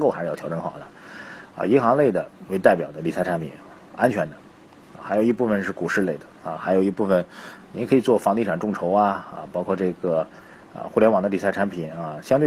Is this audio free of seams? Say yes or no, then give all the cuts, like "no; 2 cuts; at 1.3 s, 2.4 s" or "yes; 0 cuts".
yes; 0 cuts